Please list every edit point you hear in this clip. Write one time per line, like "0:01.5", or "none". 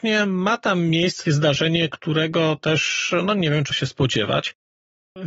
0:01.3
0:03.7

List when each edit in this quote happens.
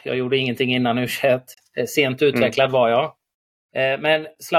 none

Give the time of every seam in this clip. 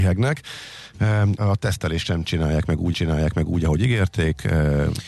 0:01.4
0:02.9

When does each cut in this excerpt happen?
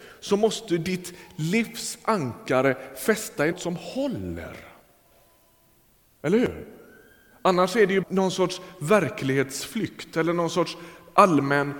0:03.5
0:08.0

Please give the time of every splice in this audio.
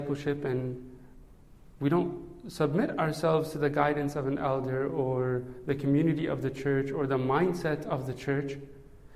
none

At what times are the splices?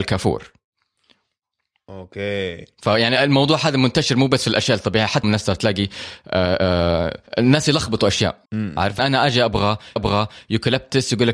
0:05.2
0:07.3
0:08.5
0:09.0
0:10.0

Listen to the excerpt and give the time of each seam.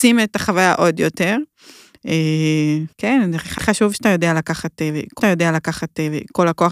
0:02.9
0:03.6
0:05.2

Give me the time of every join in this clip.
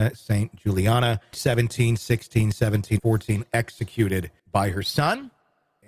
0:01.3
0:03.0
0:04.4

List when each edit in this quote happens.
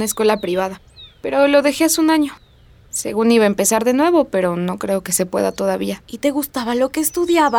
0:06.0

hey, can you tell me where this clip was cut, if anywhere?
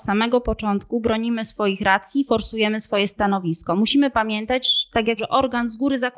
0:05.2

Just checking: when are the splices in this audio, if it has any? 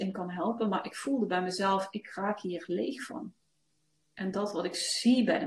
none

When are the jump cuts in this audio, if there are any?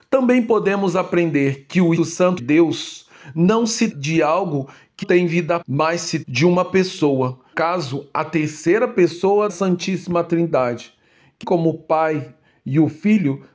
0:02.0
0:02.4
0:03.9
0:05.0
0:05.6
0:06.2
0:07.5
0:09.5
0:11.4

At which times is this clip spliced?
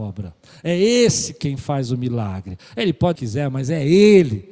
0:03.2

